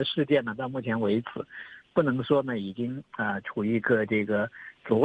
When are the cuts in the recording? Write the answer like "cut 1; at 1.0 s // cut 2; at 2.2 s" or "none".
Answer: none